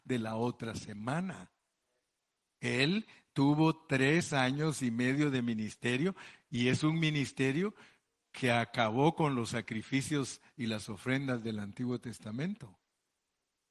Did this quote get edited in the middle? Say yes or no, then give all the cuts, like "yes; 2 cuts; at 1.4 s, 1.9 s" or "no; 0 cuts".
no; 0 cuts